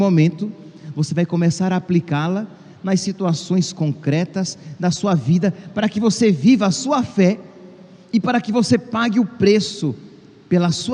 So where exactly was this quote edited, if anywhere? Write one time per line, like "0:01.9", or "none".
none